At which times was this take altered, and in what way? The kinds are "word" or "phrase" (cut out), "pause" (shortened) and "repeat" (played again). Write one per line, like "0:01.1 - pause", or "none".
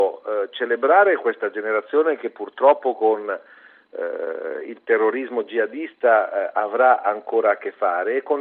none